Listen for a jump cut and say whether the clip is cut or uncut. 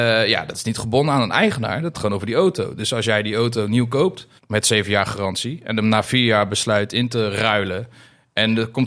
cut